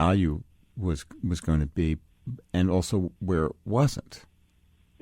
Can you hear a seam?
yes; 1 cut; at 3.2 s

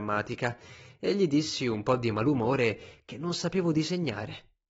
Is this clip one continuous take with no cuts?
yes; 0 cuts

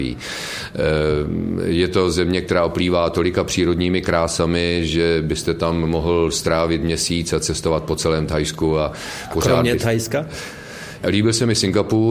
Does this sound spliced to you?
no; 0 cuts

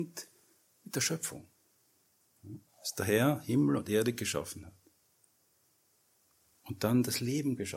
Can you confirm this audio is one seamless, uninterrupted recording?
yes; 0 cuts

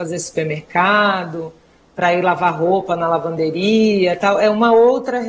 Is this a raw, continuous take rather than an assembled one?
yes; 0 cuts

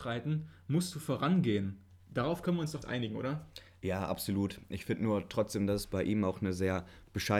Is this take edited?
yes; 1 cut; at 2.8 s

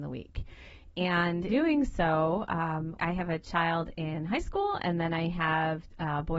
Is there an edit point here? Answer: yes; 2 cuts; at 1.5 s, 3.0 s

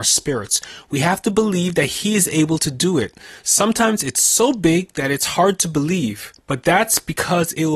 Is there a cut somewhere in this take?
no; 0 cuts

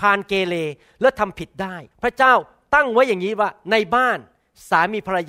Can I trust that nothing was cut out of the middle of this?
no; 1 cut; at 1.9 s

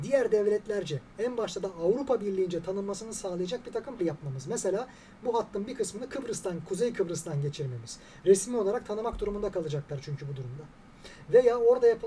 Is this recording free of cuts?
no; 1 cut; at 4.0 s

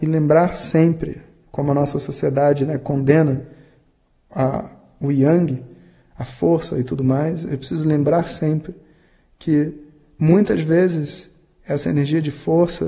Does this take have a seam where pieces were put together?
no; 0 cuts

